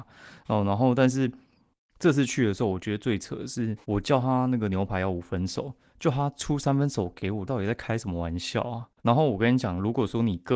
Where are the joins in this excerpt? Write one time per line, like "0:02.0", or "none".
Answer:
0:03.8
0:07.5
0:09.0